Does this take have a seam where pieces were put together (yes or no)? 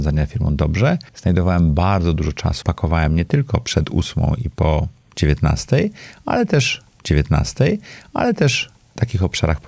yes